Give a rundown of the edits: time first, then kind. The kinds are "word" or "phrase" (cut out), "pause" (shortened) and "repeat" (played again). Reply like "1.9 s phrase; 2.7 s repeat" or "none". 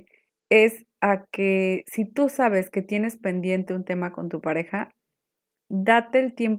none